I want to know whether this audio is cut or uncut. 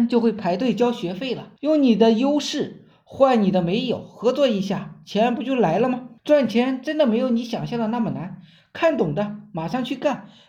cut